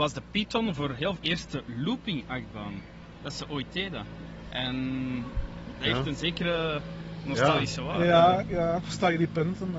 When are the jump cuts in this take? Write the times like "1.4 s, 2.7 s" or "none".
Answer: 1.2 s, 8.4 s